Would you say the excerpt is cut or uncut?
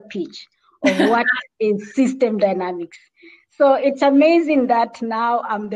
uncut